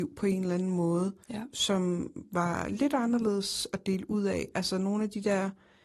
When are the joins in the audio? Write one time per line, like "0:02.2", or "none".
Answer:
0:01.2

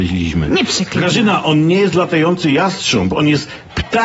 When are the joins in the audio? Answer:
none

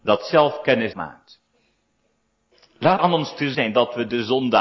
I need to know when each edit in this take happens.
0:00.9
0:03.0
0:03.5

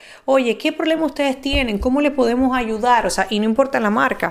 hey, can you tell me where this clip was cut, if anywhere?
none

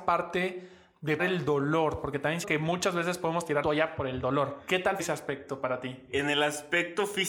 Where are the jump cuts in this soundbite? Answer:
0:01.2
0:02.4
0:03.6
0:05.0

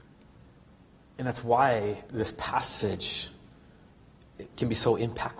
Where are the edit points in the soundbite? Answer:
0:02.1

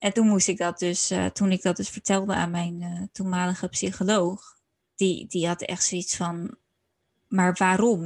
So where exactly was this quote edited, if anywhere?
0:04.8

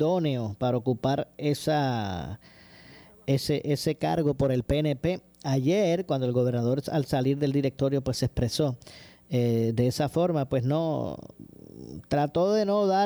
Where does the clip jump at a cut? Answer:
none

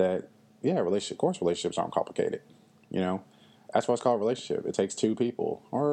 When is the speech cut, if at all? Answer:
none

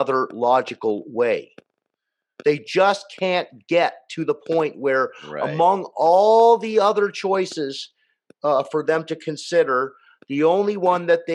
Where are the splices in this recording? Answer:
none

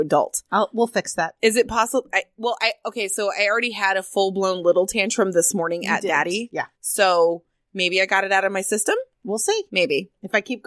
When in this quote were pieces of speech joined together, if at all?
0:06.7
0:09.1
0:09.7

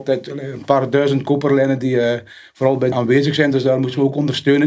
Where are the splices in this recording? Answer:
0:02.9

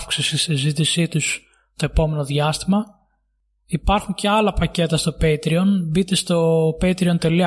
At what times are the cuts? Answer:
none

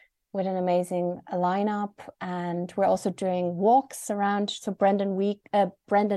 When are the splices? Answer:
none

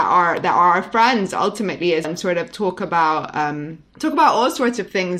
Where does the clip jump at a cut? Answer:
0:02.0
0:03.9

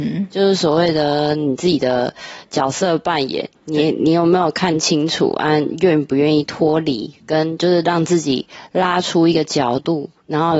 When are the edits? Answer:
0:03.5

